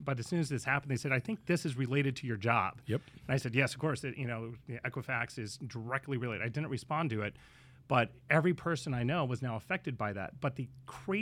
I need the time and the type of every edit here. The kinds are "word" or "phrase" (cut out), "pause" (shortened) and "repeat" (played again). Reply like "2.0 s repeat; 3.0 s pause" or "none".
none